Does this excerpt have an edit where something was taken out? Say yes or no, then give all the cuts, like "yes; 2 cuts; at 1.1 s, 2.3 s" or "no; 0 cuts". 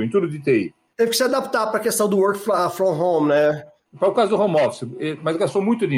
no; 0 cuts